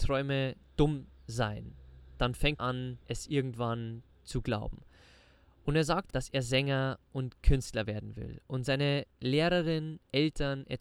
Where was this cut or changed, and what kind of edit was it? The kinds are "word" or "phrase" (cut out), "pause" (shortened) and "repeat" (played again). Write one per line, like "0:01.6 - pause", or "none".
0:02.6 - word
0:03.0 - pause
0:06.1 - phrase